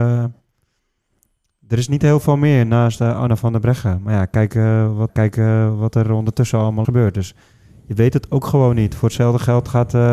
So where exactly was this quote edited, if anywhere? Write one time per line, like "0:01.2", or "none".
0:05.1
0:06.8